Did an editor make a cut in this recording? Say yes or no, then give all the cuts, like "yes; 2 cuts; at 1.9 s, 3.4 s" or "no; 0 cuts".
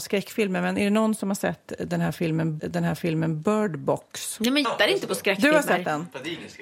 yes; 2 cuts; at 2.6 s, 4.6 s